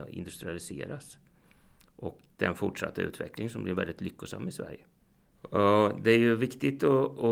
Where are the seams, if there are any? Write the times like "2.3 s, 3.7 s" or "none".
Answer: 2.3 s

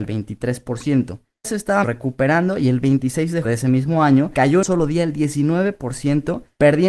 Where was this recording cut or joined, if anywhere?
1.4 s, 1.8 s, 3.4 s, 4.6 s

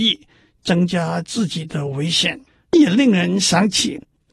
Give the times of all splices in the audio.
2.5 s

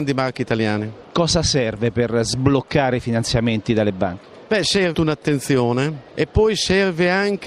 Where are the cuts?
4.9 s

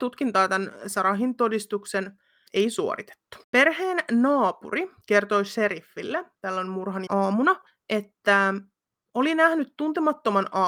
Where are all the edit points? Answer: 2.5 s, 3.4 s, 5.0 s, 6.3 s, 7.1 s, 7.7 s

